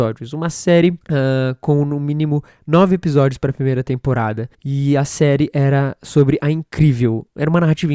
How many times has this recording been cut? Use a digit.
2